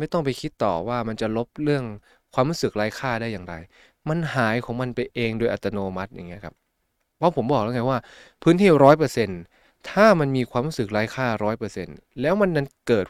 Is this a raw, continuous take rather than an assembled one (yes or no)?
yes